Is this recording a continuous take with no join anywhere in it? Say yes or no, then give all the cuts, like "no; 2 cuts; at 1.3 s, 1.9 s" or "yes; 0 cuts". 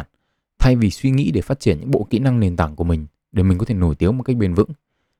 yes; 0 cuts